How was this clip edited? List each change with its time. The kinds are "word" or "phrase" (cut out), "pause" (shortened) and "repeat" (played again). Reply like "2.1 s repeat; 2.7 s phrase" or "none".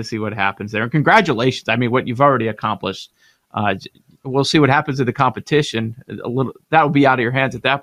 none